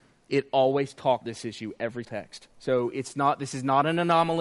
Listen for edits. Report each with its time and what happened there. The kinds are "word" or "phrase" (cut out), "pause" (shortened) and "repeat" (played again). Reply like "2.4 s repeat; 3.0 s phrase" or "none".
1.2 s word; 2.0 s word; 2.5 s pause